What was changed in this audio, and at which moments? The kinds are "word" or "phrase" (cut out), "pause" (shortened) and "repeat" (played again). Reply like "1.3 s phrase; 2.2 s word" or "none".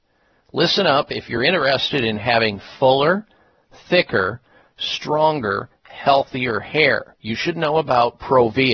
none